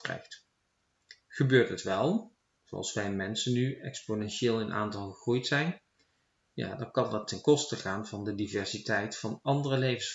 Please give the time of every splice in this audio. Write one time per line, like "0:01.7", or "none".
none